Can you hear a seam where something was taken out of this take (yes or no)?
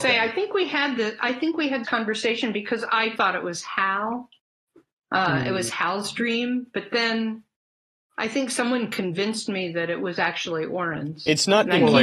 yes